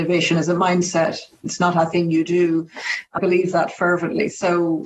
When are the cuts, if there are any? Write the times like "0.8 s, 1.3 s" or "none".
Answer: 3.2 s